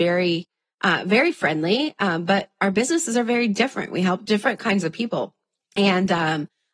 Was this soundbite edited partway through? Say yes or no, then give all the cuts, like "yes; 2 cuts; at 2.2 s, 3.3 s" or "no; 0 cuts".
no; 0 cuts